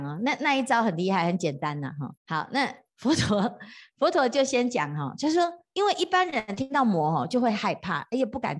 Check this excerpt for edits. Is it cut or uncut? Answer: cut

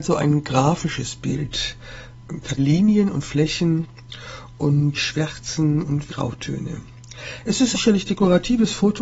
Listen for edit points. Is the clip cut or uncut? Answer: cut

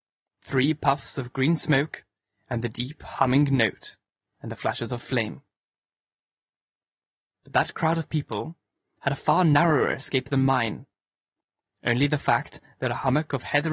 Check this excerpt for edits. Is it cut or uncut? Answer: uncut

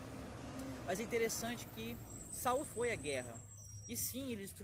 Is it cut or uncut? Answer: cut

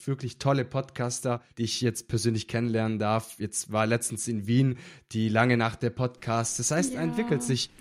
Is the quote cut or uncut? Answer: cut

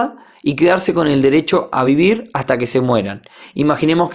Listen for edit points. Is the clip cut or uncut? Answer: uncut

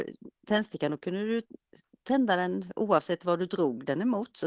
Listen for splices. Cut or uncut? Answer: cut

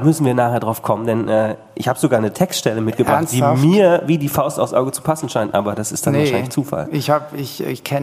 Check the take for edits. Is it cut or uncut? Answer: uncut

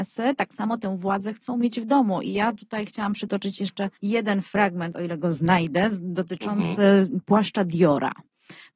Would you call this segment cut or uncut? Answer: cut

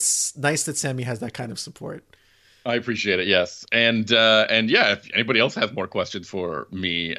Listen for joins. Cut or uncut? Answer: uncut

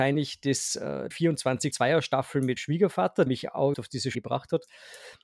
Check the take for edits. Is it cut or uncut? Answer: cut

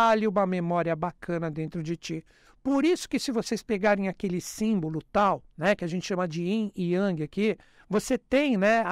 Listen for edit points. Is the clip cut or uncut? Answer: cut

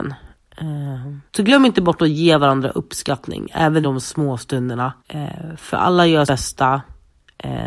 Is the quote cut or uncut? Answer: cut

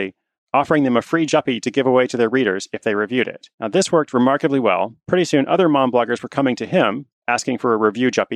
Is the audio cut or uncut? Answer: cut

